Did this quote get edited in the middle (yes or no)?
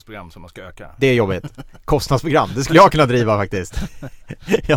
no